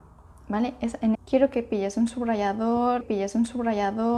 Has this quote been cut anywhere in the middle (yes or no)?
yes